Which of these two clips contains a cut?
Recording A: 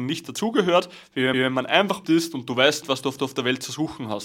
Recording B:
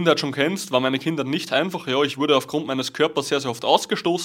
A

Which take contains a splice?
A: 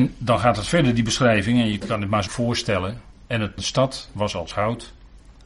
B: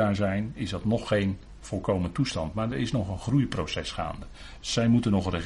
A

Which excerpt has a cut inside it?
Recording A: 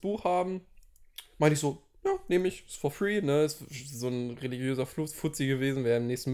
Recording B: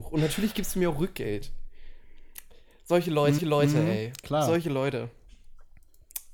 B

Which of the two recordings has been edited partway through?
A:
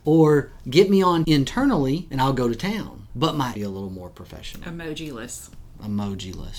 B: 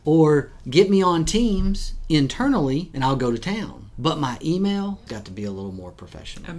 A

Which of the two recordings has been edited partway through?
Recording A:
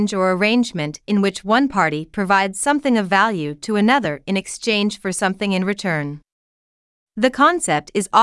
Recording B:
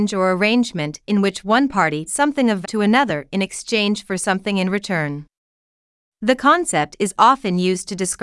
B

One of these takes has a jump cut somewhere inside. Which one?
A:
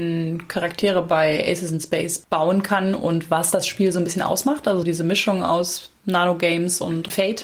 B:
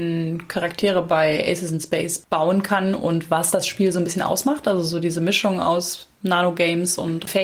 A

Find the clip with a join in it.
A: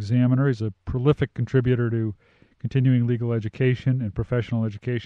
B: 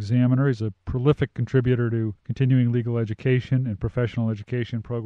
B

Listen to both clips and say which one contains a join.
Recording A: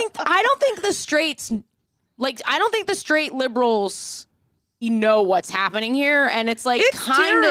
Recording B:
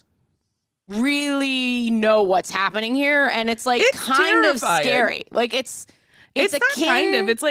A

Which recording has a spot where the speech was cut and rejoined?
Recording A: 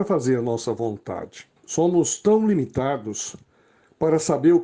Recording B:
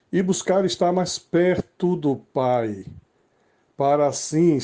A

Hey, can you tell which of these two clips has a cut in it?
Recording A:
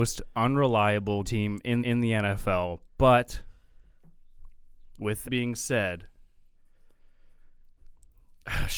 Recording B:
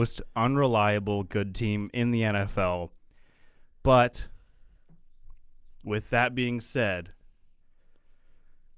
A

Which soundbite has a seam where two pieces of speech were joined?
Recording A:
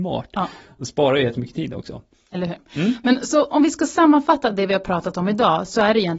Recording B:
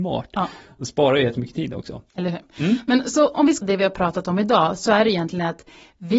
B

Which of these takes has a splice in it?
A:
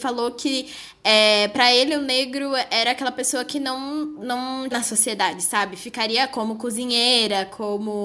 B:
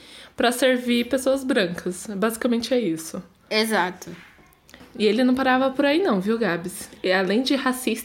A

